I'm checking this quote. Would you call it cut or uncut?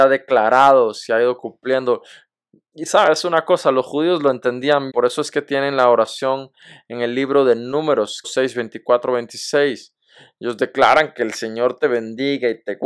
cut